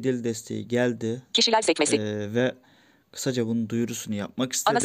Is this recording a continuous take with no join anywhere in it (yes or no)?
yes